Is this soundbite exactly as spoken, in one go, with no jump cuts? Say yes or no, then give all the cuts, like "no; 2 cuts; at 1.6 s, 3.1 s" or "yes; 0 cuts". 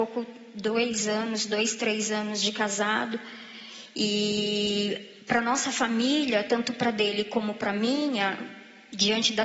no; 1 cut; at 5.2 s